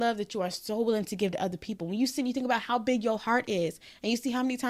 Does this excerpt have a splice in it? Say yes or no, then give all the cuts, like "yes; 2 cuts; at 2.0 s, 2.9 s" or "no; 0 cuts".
no; 0 cuts